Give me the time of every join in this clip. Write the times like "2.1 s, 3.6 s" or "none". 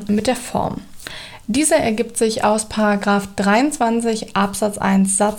none

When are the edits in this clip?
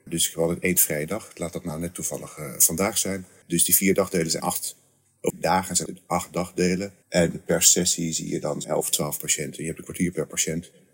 4.4 s, 5.3 s, 5.9 s, 7.0 s, 8.6 s

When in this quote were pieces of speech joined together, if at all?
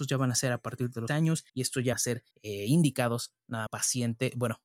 1.1 s, 1.5 s, 1.9 s, 2.3 s, 3.7 s

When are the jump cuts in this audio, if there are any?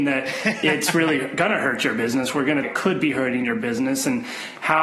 2.6 s

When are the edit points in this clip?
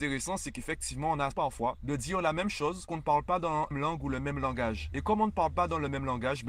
1.3 s, 2.9 s, 3.7 s

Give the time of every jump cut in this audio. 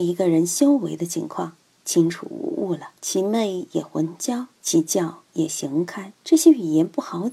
3.0 s, 4.6 s, 6.2 s

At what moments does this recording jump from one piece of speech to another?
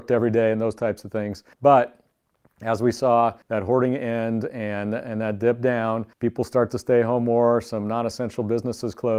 1.5 s, 3.4 s, 6.1 s

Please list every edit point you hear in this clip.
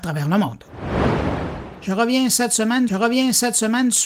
2.9 s

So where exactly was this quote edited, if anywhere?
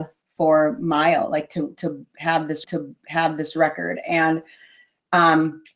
2.6 s

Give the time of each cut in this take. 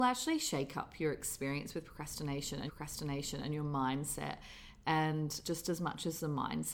2.7 s, 5.4 s

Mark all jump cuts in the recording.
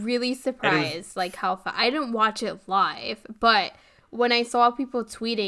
none

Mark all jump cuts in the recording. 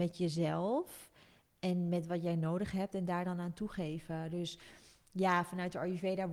none

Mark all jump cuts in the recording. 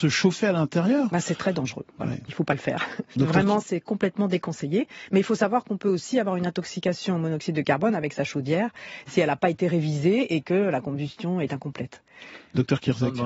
none

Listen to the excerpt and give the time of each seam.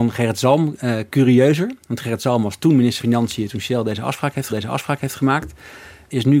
3.0 s, 4.5 s

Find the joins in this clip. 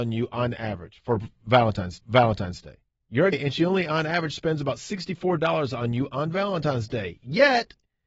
2.0 s, 3.3 s

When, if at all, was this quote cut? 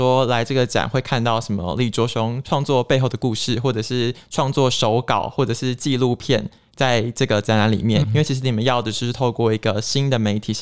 8.0 s

